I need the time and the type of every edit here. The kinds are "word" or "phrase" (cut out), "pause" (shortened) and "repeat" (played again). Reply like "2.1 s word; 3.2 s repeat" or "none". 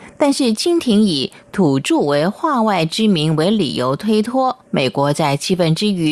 4.7 s pause